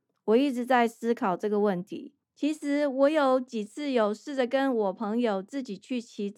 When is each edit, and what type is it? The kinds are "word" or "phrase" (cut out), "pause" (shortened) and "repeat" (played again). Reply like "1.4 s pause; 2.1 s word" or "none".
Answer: 2.2 s pause